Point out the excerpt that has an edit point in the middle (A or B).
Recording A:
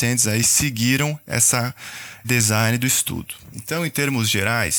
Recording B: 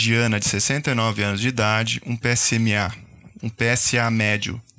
A